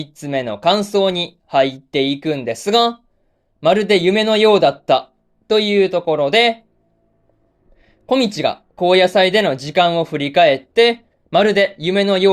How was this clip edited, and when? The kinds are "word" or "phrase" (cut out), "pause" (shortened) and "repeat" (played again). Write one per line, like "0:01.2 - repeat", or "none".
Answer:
none